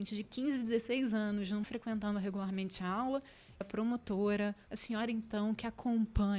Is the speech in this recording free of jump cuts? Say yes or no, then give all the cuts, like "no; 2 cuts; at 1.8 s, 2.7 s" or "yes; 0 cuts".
no; 3 cuts; at 1.6 s, 3.6 s, 4.7 s